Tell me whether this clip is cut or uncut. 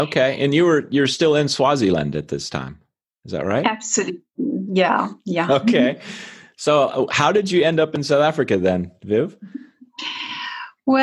uncut